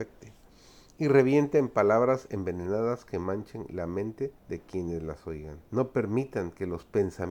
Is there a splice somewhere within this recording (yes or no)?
yes